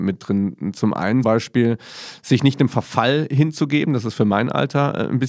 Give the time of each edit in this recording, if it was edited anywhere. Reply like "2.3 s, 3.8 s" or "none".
1.2 s